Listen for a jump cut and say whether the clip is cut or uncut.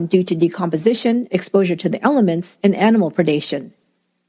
uncut